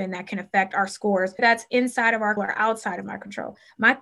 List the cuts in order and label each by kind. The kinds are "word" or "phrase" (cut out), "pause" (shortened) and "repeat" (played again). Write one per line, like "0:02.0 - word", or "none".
0:01.4 - word
0:02.4 - word